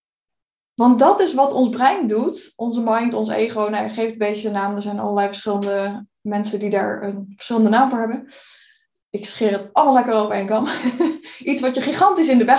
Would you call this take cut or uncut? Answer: uncut